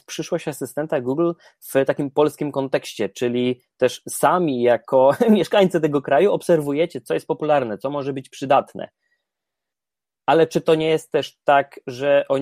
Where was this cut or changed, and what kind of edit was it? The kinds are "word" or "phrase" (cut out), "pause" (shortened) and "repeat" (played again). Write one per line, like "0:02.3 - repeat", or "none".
none